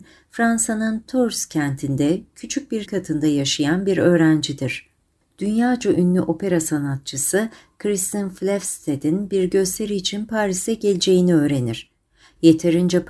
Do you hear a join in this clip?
yes; 1 cut; at 2.9 s

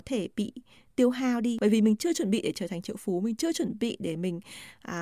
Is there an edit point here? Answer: no; 0 cuts

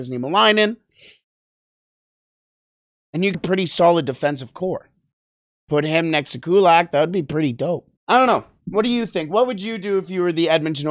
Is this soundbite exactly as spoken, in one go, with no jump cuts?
no; 3 cuts; at 3.3 s, 5.1 s, 8.0 s

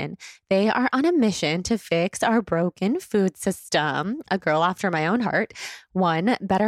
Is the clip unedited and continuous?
yes; 0 cuts

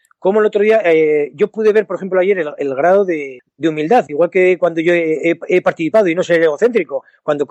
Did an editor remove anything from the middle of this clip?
yes; 1 cut; at 6.2 s

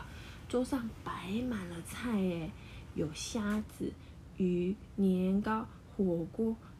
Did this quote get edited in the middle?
no; 0 cuts

